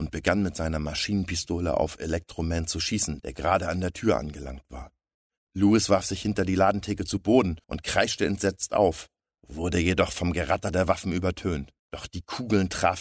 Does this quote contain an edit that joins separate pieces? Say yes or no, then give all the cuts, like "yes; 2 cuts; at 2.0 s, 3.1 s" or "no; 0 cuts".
yes; 2 cuts; at 7.6 s, 11.8 s